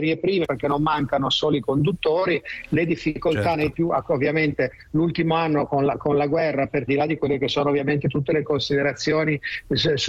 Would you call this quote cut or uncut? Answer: cut